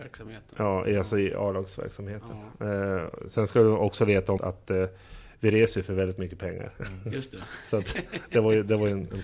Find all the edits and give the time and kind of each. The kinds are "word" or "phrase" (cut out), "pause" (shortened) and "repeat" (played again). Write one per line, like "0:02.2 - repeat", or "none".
0:04.4 - word